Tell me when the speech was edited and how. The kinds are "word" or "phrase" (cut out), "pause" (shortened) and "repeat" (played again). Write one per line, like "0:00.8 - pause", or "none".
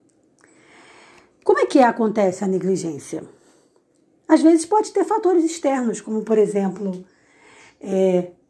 none